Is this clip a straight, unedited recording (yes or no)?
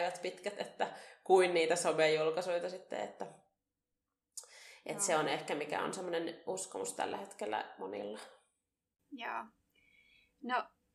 yes